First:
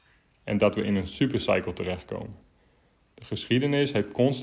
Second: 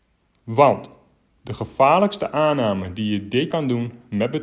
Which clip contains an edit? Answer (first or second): second